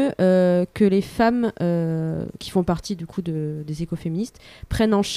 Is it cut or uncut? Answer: uncut